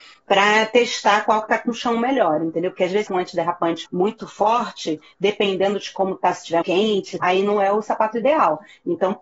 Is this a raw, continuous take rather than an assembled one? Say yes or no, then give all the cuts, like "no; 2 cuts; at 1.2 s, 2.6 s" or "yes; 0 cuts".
no; 4 cuts; at 3.1 s, 3.8 s, 6.6 s, 7.2 s